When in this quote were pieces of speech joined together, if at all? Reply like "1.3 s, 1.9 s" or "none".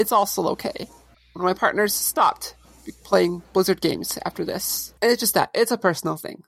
1.1 s, 3.4 s, 5.0 s